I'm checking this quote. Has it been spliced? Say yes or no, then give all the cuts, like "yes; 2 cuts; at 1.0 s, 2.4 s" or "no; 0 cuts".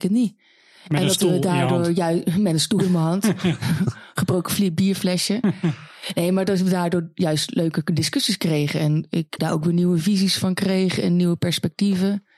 yes; 1 cut; at 9.4 s